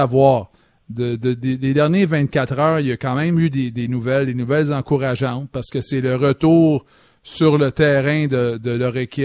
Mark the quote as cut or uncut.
uncut